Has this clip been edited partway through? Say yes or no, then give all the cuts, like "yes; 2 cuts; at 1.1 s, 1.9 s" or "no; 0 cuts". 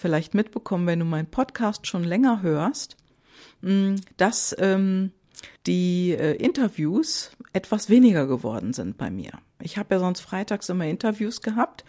yes; 1 cut; at 5.6 s